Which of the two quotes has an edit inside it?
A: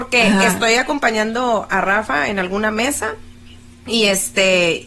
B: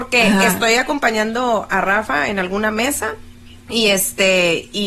B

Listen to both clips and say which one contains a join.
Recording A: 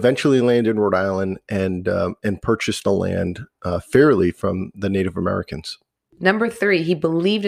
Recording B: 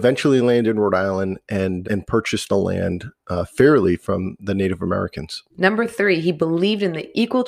B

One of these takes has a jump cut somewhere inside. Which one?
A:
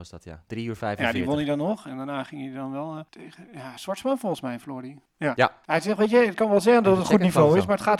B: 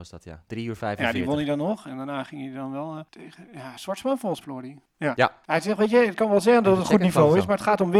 B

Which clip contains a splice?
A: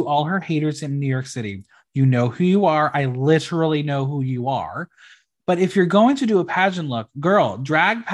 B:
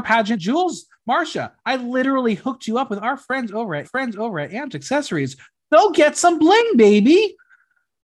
B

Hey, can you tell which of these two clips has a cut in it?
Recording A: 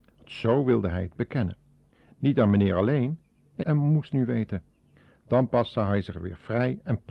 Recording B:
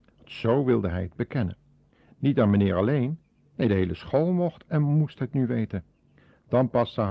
A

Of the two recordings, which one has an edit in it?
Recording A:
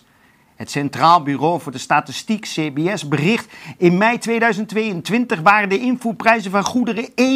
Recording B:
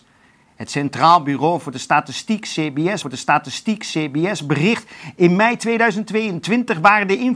B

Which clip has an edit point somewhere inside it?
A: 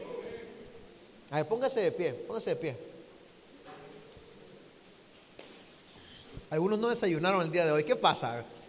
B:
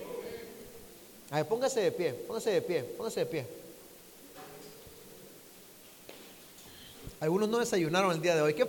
B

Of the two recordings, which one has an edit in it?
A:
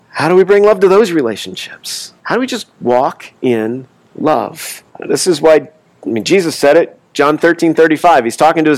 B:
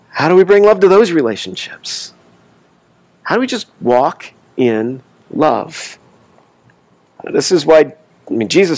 A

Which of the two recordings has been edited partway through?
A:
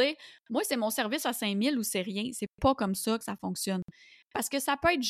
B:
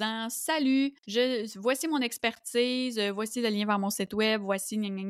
B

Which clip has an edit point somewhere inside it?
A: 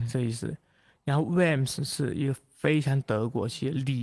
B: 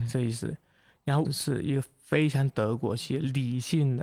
B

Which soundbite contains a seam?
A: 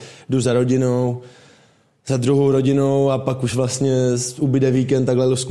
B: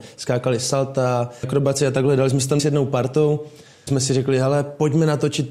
B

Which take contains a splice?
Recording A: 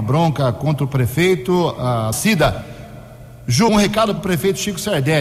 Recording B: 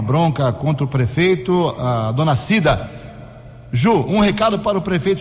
A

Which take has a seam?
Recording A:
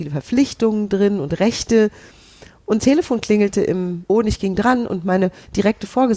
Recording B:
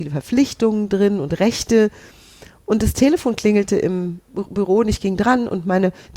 A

